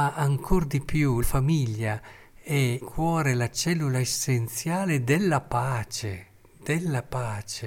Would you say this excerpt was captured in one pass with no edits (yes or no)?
no